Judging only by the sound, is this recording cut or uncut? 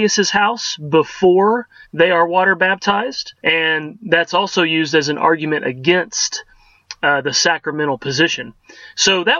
cut